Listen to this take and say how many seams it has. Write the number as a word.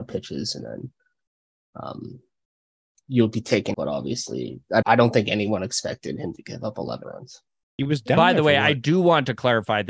three